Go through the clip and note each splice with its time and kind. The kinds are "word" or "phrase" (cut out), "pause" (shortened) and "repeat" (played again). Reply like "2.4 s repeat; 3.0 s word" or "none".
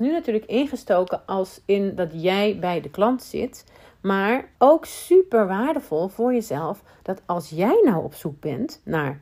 4.5 s pause